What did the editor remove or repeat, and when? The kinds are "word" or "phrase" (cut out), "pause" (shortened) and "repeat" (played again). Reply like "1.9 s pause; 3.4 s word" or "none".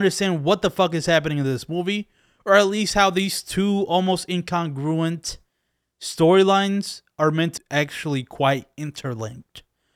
7.6 s word